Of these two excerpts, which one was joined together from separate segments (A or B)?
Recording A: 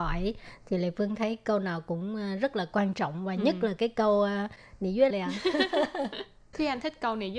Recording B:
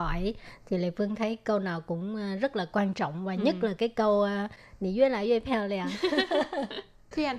A